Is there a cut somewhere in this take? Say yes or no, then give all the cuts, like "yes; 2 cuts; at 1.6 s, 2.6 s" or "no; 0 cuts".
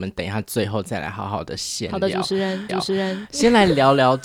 yes; 1 cut; at 2.7 s